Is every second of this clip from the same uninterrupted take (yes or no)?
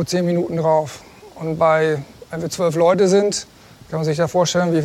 no